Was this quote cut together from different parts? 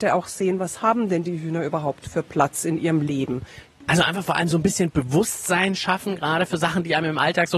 no; 0 cuts

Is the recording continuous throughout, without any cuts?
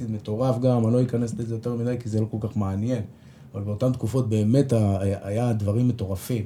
yes; 0 cuts

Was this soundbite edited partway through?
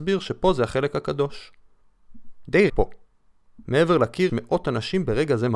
yes; 2 cuts; at 2.7 s, 4.3 s

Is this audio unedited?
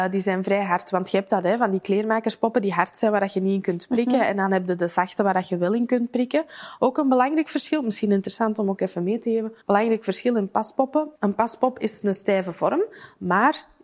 no; 2 cuts; at 9.6 s, 11.2 s

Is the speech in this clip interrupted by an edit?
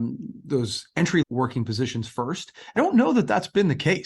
yes; 2 cuts; at 1.2 s, 2.8 s

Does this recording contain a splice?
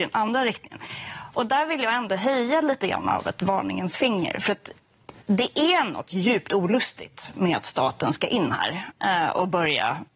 no; 0 cuts

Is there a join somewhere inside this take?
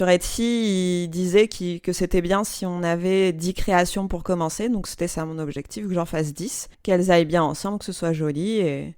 yes; 1 cut; at 6.7 s

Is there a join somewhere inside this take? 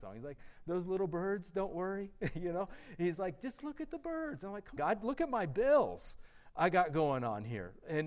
yes; 1 cut; at 4.8 s

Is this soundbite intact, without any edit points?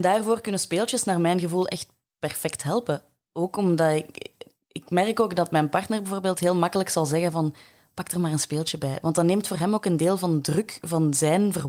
yes; 0 cuts

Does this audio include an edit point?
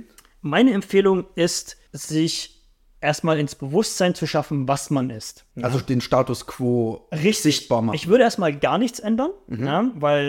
yes; 2 cuts; at 1.9 s, 5.5 s

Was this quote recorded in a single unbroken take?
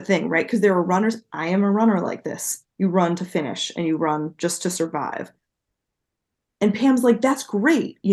yes; 0 cuts

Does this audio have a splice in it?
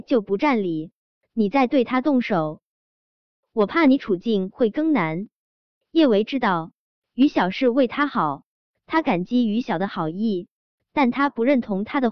no; 0 cuts

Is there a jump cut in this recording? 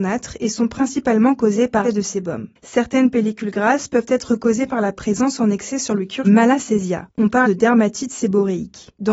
yes; 3 cuts; at 1.8 s, 6.2 s, 7.4 s

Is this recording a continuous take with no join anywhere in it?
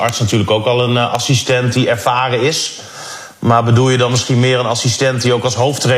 yes; 0 cuts

